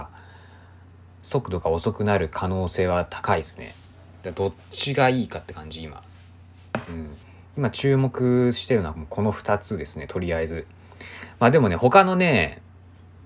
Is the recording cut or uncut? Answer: cut